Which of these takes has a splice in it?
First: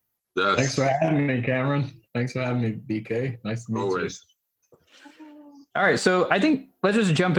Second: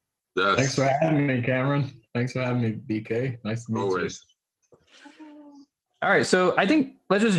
first; 1 cut; at 5.7 s

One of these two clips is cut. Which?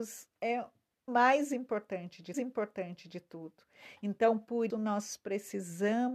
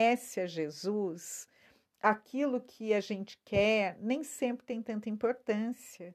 first; 3 cuts; at 1.1 s, 2.3 s, 4.7 s

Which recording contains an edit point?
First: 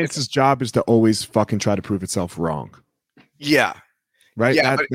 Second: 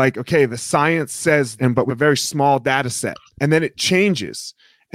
second; 3 cuts; at 1.6 s, 1.9 s, 3.4 s

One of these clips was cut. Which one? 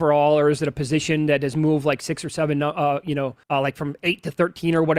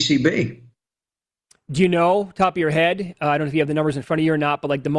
first; 1 cut; at 3.4 s

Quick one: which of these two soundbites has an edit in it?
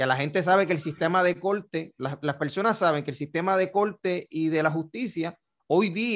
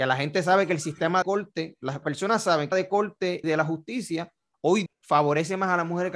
second; 5 cuts; at 1.2 s, 2.0 s, 2.7 s, 3.4 s, 4.9 s

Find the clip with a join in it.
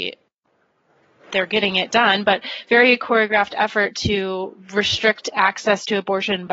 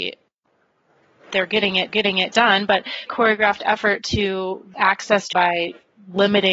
second; 4 cuts; at 1.9 s, 3.1 s, 4.7 s, 5.3 s

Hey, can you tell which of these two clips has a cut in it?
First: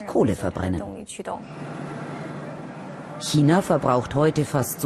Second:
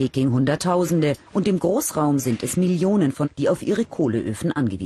second; 2 cuts; at 1.3 s, 3.2 s

